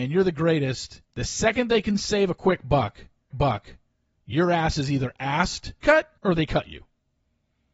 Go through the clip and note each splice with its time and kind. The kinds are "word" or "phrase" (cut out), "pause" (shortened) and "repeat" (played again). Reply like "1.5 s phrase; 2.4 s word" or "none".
1.0 s pause; 3.3 s repeat; 5.8 s phrase; 6.2 s pause